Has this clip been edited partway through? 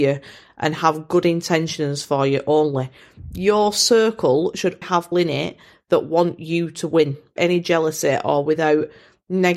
yes; 3 cuts; at 4.8 s, 5.1 s, 7.4 s

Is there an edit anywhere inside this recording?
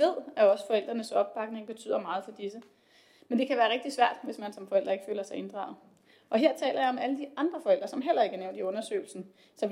no; 0 cuts

